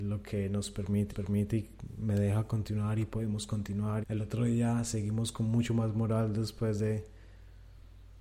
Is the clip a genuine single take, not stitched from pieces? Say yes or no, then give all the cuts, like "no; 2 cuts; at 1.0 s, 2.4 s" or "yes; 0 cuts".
no; 2 cuts; at 1.1 s, 4.0 s